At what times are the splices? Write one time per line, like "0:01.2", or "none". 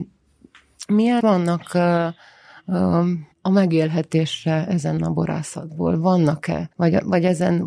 0:01.2
0:03.3
0:05.0
0:06.7